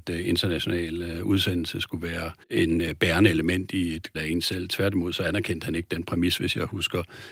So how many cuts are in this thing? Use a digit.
2